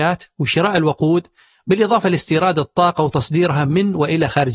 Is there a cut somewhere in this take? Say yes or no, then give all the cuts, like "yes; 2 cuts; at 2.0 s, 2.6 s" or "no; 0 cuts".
no; 0 cuts